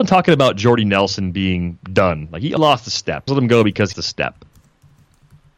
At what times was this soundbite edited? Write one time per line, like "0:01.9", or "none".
0:01.8
0:02.6
0:03.3
0:03.9